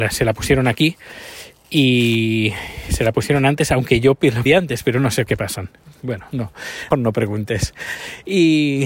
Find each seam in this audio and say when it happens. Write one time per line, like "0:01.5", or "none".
0:04.5
0:05.3
0:06.9